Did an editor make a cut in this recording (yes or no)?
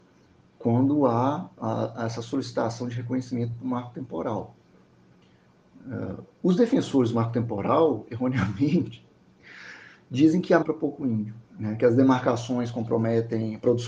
yes